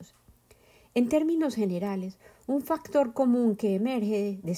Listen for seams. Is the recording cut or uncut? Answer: uncut